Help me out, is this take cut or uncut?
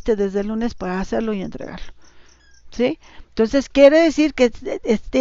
uncut